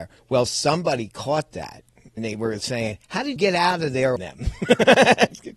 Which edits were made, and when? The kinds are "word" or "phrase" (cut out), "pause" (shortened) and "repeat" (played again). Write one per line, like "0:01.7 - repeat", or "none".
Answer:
0:02.2 - word
0:03.4 - word
0:04.2 - phrase